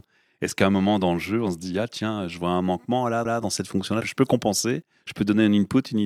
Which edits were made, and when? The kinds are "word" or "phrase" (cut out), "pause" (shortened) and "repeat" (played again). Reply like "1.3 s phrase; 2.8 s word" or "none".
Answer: 3.3 s repeat